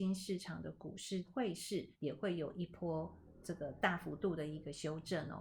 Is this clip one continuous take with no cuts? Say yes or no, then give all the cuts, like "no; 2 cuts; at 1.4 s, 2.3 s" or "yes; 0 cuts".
no; 2 cuts; at 1.2 s, 1.9 s